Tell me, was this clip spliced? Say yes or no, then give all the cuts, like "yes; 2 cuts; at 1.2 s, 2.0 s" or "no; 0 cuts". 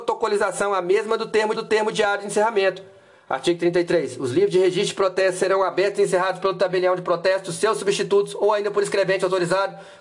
yes; 1 cut; at 1.5 s